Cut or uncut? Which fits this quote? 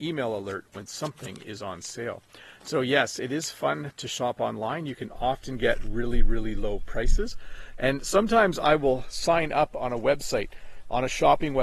uncut